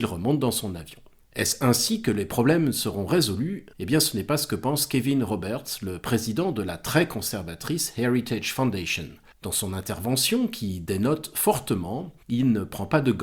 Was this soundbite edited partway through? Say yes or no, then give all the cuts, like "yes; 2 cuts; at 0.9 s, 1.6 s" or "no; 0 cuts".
yes; 4 cuts; at 1.2 s, 3.7 s, 9.3 s, 12.2 s